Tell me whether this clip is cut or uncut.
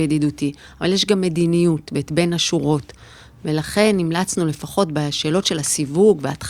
uncut